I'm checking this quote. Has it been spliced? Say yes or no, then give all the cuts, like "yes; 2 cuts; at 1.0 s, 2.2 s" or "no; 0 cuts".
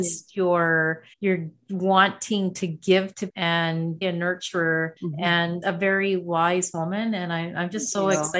yes; 5 cuts; at 1.1 s, 3.3 s, 4.0 s, 5.0 s, 5.6 s